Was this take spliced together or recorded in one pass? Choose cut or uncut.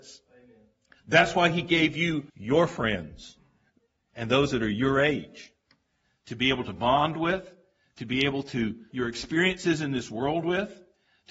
cut